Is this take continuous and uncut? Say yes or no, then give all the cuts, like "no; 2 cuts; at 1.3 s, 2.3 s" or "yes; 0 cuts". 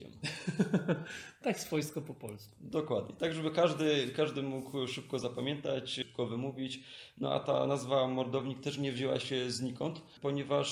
yes; 0 cuts